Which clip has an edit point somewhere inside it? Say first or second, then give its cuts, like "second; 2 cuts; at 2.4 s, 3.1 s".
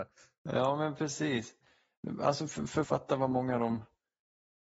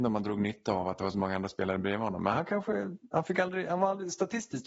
first; 1 cut; at 2.8 s